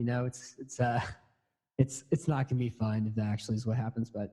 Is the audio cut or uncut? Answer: uncut